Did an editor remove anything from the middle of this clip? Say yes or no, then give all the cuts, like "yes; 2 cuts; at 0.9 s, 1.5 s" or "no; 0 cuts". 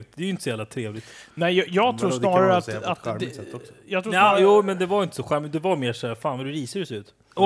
no; 0 cuts